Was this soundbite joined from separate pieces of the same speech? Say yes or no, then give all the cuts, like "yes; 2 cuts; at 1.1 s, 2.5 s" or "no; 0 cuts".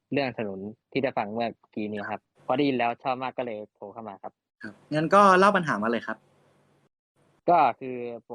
yes; 2 cuts; at 2.3 s, 4.8 s